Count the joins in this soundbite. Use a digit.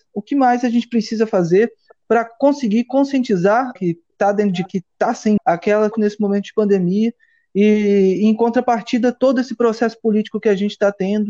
4